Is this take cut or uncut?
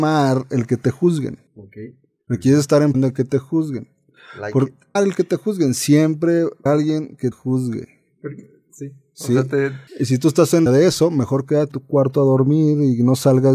cut